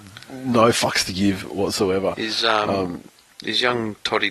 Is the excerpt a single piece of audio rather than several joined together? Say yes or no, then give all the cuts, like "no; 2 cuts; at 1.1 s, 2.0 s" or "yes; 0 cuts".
yes; 0 cuts